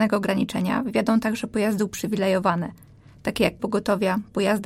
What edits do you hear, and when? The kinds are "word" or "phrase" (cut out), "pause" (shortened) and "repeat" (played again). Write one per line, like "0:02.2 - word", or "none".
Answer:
0:03.6 - word